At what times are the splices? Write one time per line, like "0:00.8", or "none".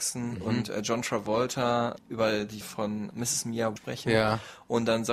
0:02.0
0:02.6
0:03.1
0:03.8